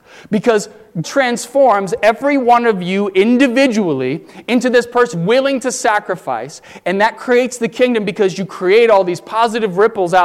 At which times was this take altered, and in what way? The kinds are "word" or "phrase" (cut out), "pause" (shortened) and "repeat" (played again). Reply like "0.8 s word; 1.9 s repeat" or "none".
1.0 s word; 5.1 s word